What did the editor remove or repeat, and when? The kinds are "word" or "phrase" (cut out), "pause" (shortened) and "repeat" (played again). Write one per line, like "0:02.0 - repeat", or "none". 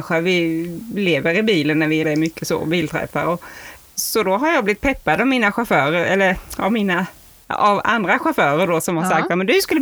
0:02.0 - phrase